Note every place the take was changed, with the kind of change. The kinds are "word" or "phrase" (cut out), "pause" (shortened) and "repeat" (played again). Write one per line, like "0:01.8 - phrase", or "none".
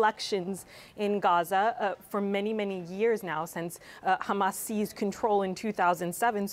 none